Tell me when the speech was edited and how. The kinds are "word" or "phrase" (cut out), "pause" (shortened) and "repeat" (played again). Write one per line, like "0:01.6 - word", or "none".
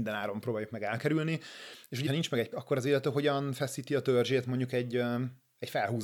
0:02.1 - phrase
0:02.5 - word